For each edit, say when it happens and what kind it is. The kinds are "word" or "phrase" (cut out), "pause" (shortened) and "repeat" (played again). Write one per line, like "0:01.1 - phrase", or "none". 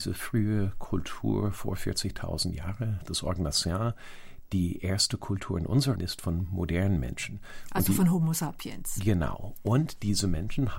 0:06.0 - word